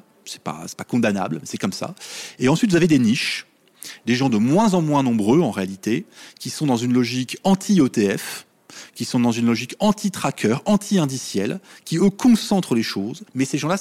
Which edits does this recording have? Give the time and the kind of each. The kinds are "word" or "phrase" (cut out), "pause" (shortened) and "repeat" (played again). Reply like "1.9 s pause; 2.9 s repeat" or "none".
none